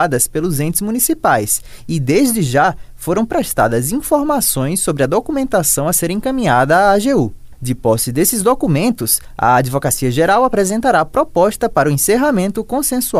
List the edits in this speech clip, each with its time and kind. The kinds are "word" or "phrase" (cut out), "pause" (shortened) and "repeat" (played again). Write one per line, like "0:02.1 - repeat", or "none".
none